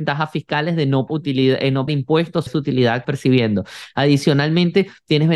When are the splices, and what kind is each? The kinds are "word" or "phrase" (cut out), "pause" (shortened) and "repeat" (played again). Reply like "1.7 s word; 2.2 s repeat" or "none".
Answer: 1.1 s word; 1.9 s word; 2.5 s word; 3.0 s word